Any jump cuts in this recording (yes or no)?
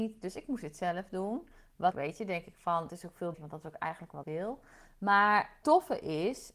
yes